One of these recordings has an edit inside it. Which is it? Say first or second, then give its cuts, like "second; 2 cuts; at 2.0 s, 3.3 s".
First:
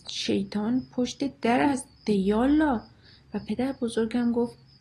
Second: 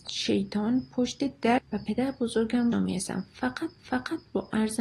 second; 3 cuts; at 1.6 s, 2.7 s, 3.8 s